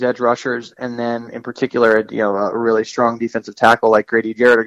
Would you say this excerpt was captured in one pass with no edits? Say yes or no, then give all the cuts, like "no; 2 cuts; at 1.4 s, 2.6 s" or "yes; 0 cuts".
yes; 0 cuts